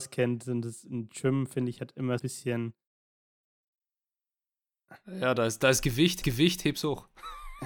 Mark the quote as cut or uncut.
cut